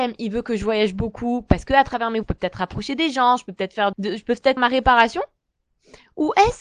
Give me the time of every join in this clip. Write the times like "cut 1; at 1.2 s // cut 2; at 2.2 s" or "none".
cut 1; at 2.2 s // cut 2; at 3.9 s // cut 3; at 4.6 s